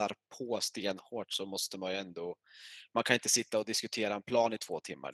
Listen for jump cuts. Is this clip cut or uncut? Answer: uncut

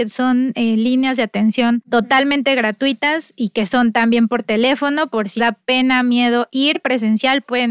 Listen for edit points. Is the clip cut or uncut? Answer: cut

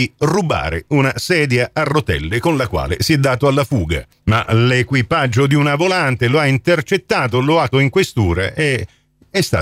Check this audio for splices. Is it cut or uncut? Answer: cut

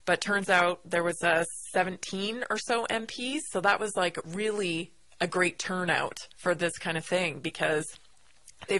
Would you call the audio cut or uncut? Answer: cut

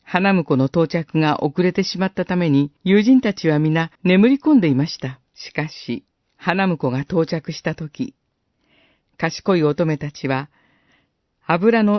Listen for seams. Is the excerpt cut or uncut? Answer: cut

